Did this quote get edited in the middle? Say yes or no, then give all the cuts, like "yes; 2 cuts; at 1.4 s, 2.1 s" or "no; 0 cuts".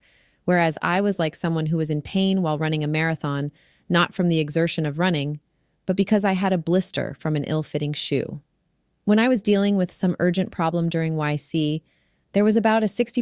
no; 0 cuts